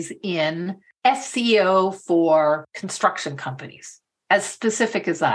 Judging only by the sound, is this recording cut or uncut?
uncut